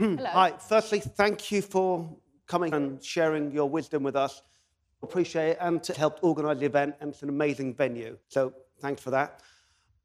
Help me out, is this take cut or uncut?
cut